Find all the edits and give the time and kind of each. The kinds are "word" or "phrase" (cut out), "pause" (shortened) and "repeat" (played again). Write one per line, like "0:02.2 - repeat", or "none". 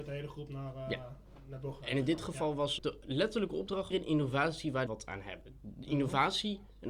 0:02.8 - phrase
0:03.9 - phrase
0:04.9 - phrase